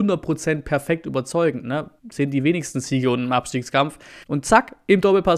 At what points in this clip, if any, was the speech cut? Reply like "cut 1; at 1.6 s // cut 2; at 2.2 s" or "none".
cut 1; at 2.0 s // cut 2; at 4.2 s

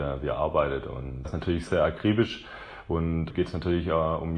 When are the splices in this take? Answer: cut 1; at 1.2 s // cut 2; at 1.7 s // cut 3; at 3.3 s

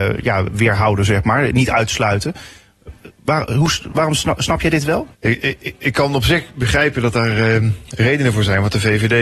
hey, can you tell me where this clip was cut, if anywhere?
cut 1; at 5.1 s

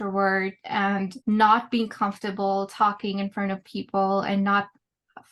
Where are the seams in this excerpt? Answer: cut 1; at 1.2 s

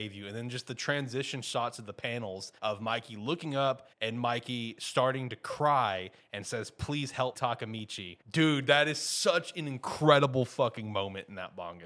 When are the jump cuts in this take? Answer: cut 1; at 2.6 s // cut 2; at 3.9 s // cut 3; at 7.3 s // cut 4; at 8.2 s

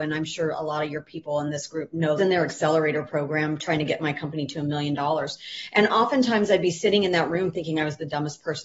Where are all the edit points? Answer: cut 1; at 2.2 s

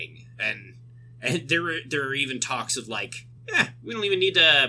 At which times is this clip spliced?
cut 1; at 3.4 s

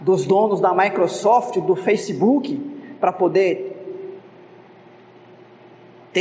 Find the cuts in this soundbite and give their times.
none

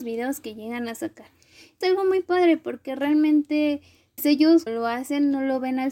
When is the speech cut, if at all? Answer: cut 1; at 1.8 s // cut 2; at 4.2 s // cut 3; at 4.7 s

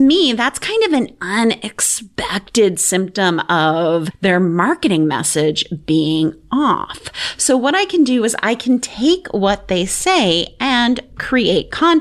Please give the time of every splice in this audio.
none

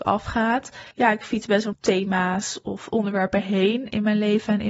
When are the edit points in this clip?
cut 1; at 0.9 s // cut 2; at 1.7 s

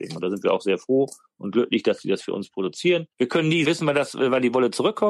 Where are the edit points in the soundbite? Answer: cut 1; at 3.1 s

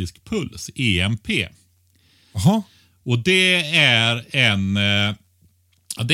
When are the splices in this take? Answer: none

